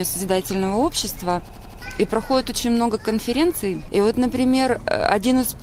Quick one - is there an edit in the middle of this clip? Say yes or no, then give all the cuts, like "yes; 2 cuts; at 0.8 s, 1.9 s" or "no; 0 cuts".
no; 0 cuts